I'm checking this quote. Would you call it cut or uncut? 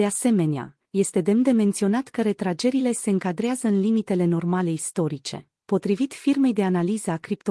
uncut